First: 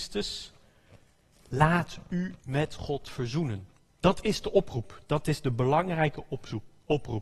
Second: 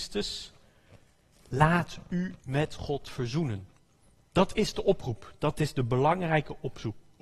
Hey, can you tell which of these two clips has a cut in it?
first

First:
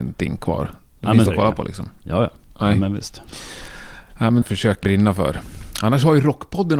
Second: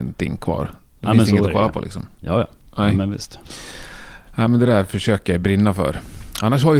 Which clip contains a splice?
first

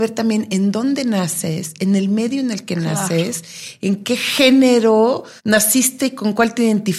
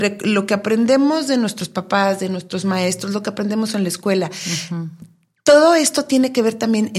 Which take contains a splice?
first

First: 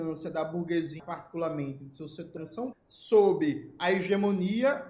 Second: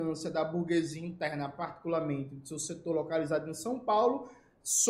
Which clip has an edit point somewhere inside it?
first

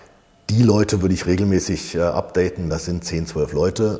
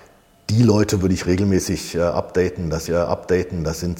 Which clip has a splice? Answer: second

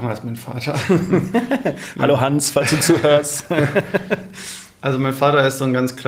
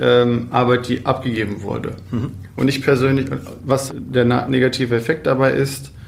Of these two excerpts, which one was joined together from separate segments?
second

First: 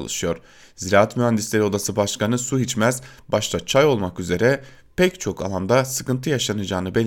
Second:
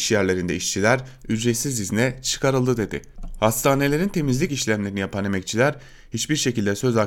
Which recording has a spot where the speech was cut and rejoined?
second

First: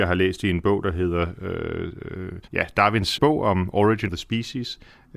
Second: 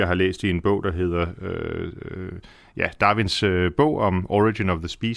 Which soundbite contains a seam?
first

